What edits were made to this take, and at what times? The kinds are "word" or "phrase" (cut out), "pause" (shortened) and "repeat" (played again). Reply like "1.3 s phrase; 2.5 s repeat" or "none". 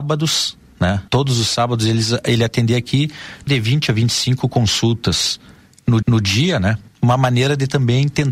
1.1 s pause; 3.5 s phrase; 6.0 s repeat; 6.9 s pause